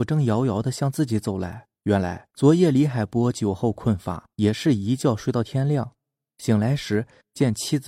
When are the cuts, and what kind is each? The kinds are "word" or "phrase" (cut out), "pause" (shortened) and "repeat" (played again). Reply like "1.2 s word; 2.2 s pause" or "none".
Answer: 1.8 s pause; 2.3 s pause; 4.3 s pause